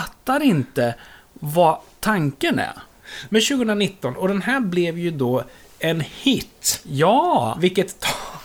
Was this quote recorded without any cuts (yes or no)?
yes